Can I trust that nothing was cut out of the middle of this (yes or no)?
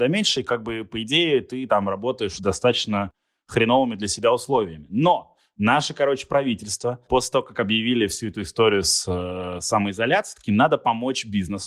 yes